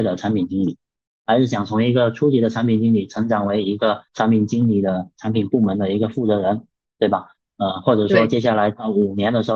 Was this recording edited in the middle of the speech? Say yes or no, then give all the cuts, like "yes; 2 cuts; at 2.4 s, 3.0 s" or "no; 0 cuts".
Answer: yes; 1 cut; at 4.1 s